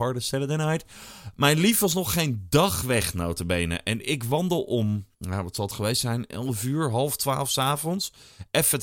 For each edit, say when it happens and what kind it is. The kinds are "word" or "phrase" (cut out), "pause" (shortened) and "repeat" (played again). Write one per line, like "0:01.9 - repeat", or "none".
0:05.1 - pause